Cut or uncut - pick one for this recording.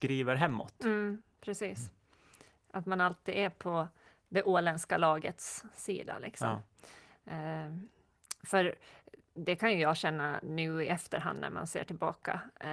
uncut